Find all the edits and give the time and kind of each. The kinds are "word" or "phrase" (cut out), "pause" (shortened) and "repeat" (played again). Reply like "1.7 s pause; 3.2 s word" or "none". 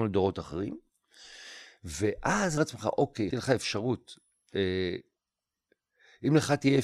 2.6 s phrase; 3.3 s phrase